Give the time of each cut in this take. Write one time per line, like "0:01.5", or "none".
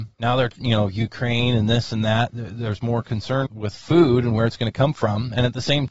0:03.4